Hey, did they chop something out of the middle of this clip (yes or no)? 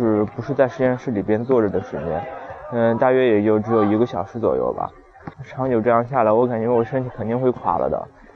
yes